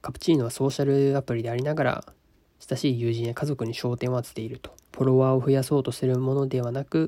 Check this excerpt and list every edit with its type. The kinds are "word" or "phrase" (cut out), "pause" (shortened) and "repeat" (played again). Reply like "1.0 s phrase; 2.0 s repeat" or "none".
4.8 s pause